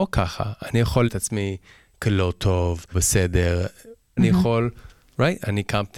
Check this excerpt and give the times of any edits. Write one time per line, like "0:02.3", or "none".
0:01.1
0:02.9
0:04.2